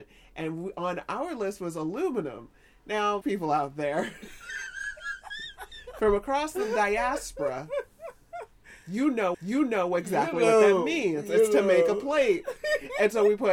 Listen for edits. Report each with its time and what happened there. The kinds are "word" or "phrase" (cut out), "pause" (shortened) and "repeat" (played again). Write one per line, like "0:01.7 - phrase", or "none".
0:03.2 - word
0:09.3 - repeat